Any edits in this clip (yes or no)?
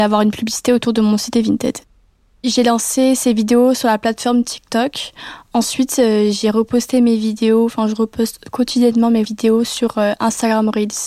no